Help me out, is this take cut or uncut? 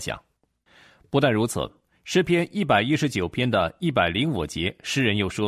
uncut